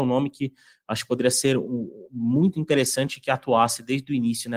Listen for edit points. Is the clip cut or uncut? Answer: uncut